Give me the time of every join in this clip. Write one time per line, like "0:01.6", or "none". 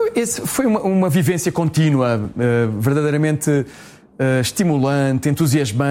none